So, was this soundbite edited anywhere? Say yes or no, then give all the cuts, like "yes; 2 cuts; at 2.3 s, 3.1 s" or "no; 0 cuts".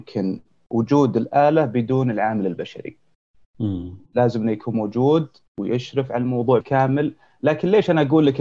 yes; 1 cut; at 6.6 s